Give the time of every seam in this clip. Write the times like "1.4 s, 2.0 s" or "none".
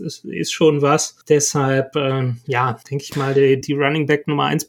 1.2 s, 2.8 s, 3.6 s

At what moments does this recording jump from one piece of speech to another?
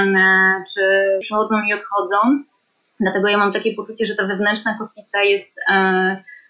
1.2 s

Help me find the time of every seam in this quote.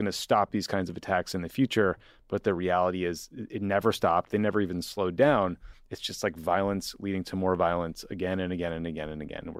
none

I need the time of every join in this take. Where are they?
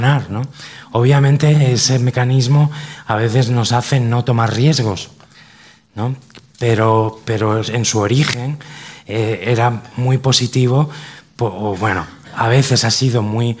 none

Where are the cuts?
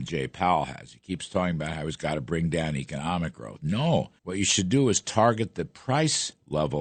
4.2 s

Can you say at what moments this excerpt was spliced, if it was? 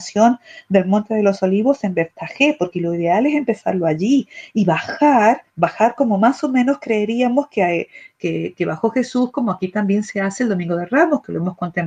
5.5 s

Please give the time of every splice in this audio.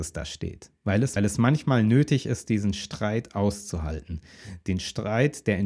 1.2 s

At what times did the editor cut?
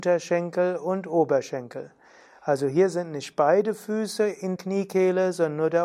4.6 s

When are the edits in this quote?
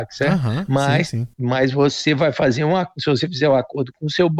1.3 s

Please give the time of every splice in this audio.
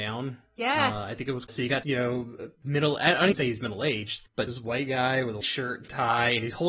1.5 s, 1.8 s, 3.3 s, 4.5 s, 5.4 s

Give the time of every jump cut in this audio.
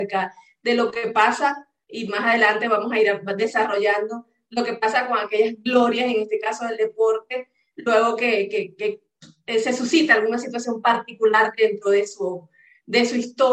none

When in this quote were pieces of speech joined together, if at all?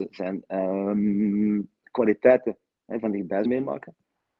3.4 s

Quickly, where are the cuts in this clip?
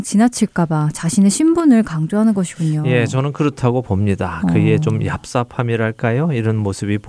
none

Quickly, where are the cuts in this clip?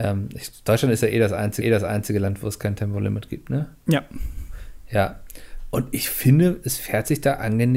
1.6 s

